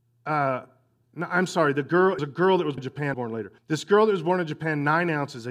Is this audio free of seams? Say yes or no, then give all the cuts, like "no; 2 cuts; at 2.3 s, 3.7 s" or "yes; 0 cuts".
no; 4 cuts; at 2.2 s, 2.8 s, 3.1 s, 3.6 s